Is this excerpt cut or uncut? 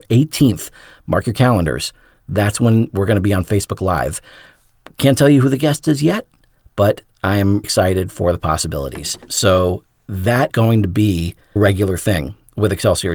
cut